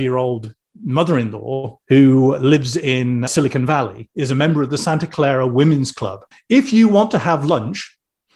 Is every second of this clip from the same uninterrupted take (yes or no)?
no